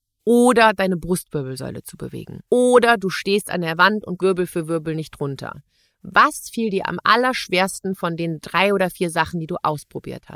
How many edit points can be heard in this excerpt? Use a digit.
2